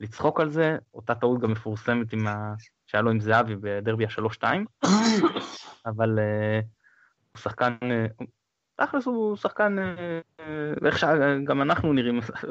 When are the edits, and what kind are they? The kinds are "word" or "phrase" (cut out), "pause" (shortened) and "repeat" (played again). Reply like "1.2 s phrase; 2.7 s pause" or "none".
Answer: none